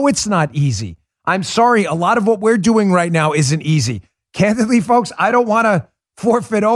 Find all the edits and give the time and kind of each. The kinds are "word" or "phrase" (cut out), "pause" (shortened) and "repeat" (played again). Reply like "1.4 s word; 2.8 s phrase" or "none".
none